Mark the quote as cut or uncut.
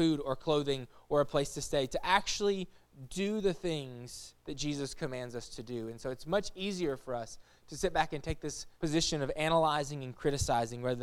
cut